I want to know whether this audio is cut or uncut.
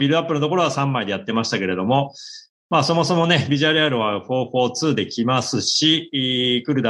uncut